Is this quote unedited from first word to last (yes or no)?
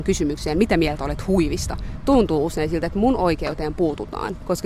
yes